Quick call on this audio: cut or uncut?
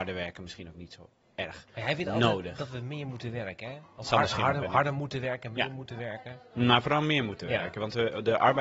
uncut